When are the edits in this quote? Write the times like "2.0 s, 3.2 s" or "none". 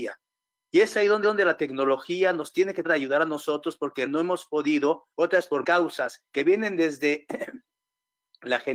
1.2 s, 2.8 s, 4.1 s, 5.1 s, 5.6 s, 6.3 s